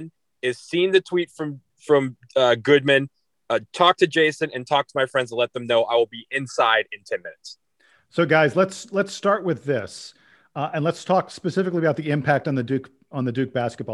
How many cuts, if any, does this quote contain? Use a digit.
0